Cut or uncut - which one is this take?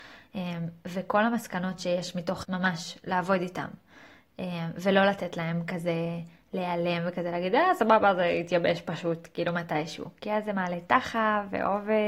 cut